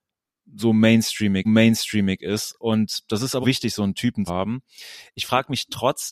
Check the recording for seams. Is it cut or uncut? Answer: cut